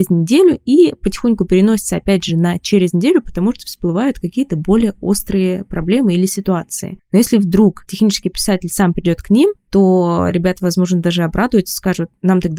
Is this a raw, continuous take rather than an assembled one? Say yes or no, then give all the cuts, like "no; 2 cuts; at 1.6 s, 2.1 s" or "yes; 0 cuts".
yes; 0 cuts